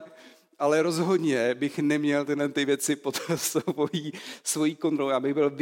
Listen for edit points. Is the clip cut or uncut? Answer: uncut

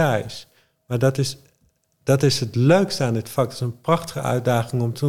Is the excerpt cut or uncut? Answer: uncut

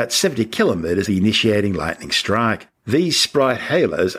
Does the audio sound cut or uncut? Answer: cut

